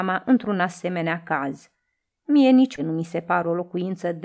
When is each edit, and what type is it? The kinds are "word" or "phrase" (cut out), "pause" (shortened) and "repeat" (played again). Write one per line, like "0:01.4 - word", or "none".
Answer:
0:02.8 - word

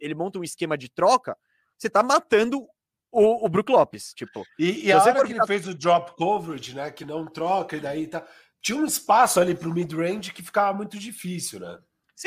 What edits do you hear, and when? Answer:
none

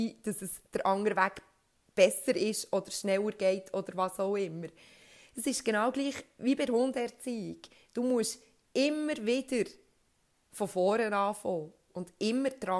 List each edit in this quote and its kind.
none

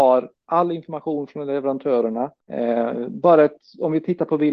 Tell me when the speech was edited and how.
0:02.4 - pause

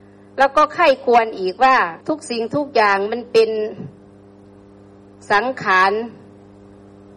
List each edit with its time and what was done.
0:02.0 - pause

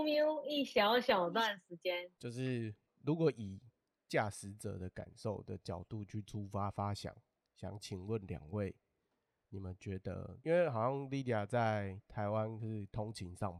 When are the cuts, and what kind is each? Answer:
none

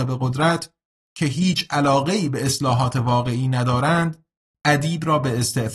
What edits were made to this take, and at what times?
none

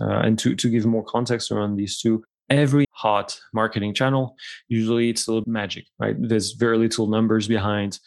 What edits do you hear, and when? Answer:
0:02.8 - phrase
0:05.4 - word

